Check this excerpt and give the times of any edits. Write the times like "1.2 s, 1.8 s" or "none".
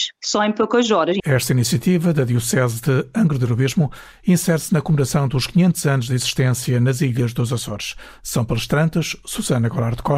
none